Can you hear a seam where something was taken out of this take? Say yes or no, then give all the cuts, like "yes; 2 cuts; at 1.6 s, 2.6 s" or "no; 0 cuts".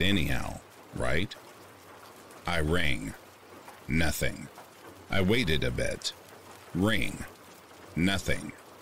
no; 0 cuts